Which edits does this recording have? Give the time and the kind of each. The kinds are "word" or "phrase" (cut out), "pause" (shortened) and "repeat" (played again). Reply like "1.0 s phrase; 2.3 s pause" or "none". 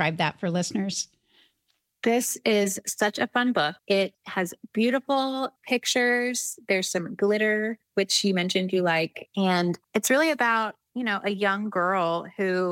3.8 s pause; 5.6 s pause; 7.9 s pause; 9.8 s pause